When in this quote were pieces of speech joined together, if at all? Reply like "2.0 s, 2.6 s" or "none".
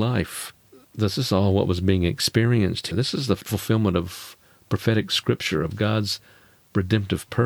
none